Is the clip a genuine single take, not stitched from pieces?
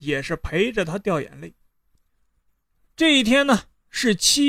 yes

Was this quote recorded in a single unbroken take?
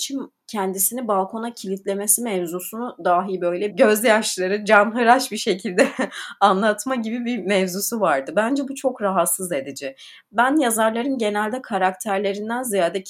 no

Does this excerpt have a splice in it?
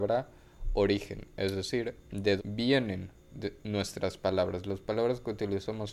yes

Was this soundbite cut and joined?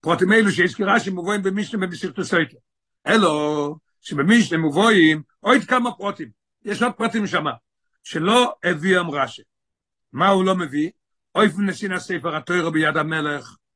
no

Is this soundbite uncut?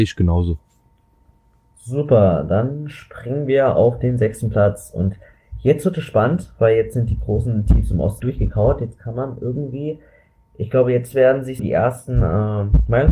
no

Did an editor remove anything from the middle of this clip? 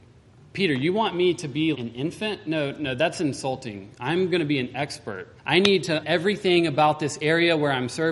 yes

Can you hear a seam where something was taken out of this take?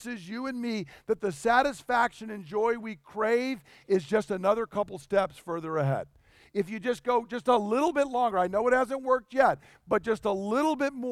no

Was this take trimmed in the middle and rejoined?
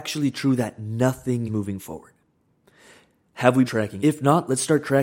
yes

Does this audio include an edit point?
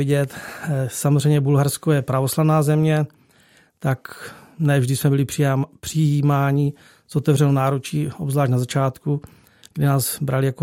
no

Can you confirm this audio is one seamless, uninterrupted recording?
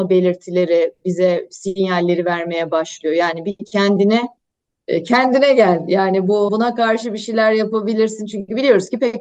no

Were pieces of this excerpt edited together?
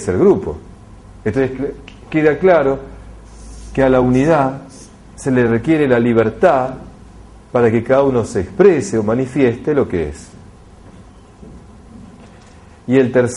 no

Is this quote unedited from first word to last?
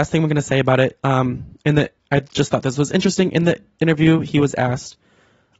yes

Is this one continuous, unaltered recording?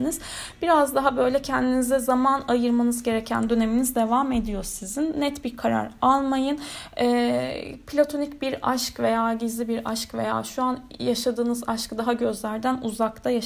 yes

